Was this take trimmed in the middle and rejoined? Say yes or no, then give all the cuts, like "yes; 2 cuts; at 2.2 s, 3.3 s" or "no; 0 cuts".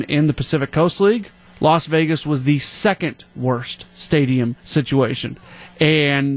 yes; 2 cuts; at 1.5 s, 4.6 s